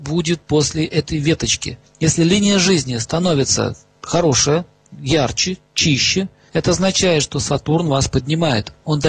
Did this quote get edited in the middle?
no; 0 cuts

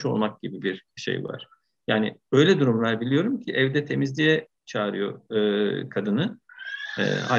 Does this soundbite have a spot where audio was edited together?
no; 0 cuts

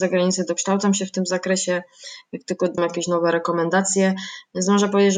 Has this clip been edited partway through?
yes; 1 cut; at 2.8 s

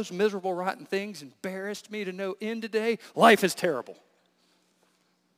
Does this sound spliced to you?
no; 0 cuts

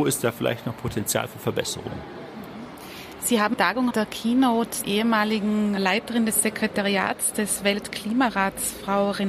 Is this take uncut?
no; 4 cuts; at 3.5 s, 3.9 s, 4.8 s, 5.8 s

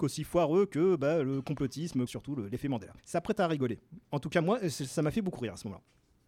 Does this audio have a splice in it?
yes; 2 cuts; at 2.1 s, 3.0 s

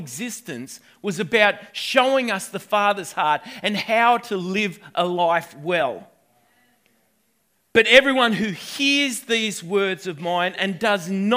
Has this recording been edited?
no; 0 cuts

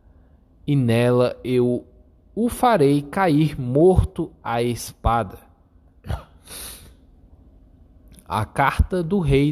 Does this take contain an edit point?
no; 0 cuts

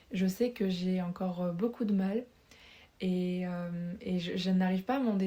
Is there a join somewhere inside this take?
no; 0 cuts

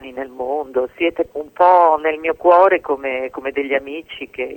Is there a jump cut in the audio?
yes; 1 cut; at 1.3 s

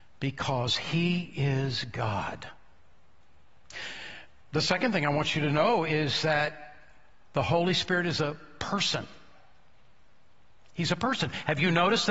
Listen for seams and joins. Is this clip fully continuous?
yes; 0 cuts

